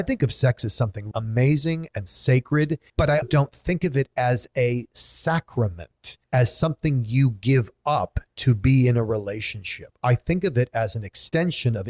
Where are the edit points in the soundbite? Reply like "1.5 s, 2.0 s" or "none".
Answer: 1.1 s, 2.9 s, 3.2 s, 6.2 s